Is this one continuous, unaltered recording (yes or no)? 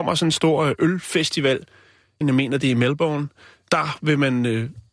no